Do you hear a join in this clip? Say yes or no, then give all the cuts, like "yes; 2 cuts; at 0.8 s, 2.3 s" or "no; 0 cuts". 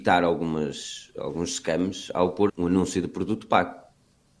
yes; 1 cut; at 2.5 s